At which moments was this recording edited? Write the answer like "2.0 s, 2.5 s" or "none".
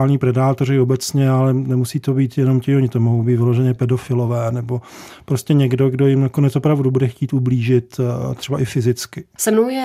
none